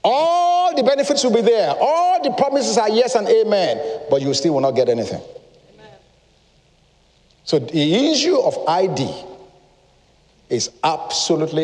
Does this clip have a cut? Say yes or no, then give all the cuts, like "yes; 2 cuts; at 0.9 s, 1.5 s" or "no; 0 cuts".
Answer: no; 0 cuts